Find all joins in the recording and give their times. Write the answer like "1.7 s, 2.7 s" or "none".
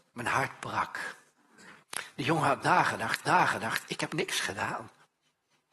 1.8 s, 3.2 s, 4.1 s